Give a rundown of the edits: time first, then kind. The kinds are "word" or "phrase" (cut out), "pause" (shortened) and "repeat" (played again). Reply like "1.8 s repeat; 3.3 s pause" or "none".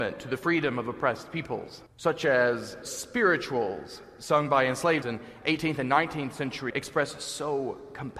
1.9 s pause; 2.8 s word; 5.0 s word; 6.7 s word